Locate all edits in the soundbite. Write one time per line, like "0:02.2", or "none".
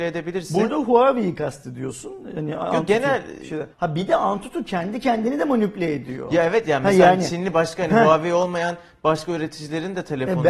0:03.7